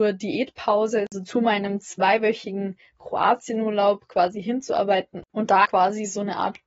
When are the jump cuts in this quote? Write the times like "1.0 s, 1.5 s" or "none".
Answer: 5.6 s